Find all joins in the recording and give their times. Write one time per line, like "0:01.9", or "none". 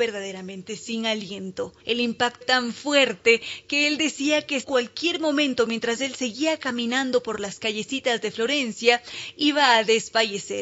0:01.8
0:02.4
0:04.6